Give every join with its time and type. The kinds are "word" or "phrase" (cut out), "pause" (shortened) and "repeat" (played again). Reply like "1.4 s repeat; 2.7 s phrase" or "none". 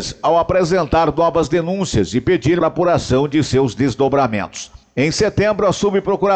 2.6 s word